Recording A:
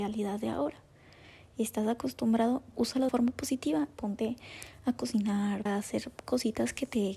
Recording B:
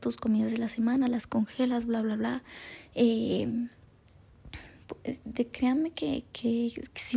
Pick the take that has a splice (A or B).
A